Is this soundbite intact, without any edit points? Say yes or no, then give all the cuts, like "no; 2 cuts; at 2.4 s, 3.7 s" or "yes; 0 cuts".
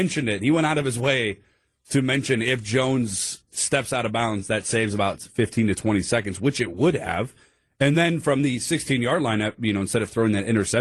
yes; 0 cuts